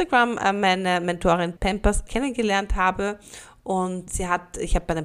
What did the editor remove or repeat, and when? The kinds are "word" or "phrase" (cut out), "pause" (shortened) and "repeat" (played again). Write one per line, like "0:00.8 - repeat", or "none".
0:01.6 - word
0:02.1 - word
0:04.1 - word